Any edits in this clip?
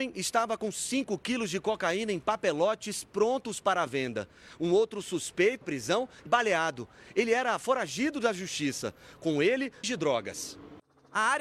yes; 3 cuts; at 5.6 s, 6.3 s, 9.8 s

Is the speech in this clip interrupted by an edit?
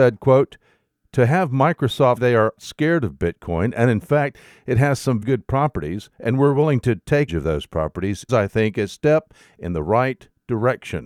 yes; 5 cuts; at 2.2 s, 2.6 s, 5.2 s, 7.3 s, 8.3 s

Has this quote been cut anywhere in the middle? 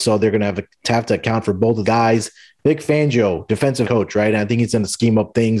yes; 2 cuts; at 1.8 s, 3.8 s

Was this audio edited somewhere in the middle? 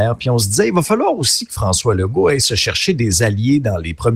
no; 0 cuts

